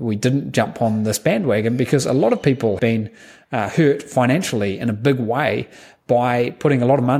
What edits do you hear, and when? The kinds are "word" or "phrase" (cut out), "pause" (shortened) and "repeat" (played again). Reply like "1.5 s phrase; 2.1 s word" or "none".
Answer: 2.8 s word